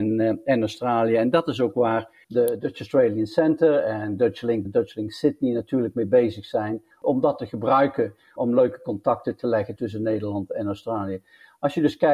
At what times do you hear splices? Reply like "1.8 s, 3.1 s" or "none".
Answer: 2.2 s, 4.6 s, 6.9 s, 8.4 s